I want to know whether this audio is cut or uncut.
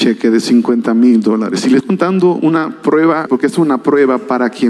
cut